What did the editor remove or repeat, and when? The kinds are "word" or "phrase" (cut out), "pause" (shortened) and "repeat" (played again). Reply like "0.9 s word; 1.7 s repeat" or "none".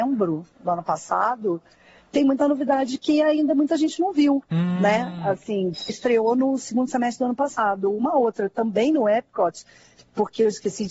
5.9 s word